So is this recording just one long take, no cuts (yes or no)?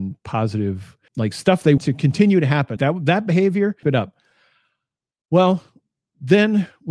no